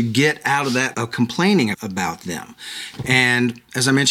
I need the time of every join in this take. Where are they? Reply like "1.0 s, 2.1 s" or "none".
0.9 s